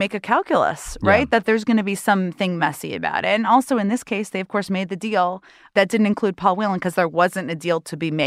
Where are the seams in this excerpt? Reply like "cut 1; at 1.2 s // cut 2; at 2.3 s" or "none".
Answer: none